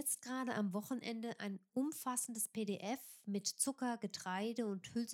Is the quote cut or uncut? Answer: uncut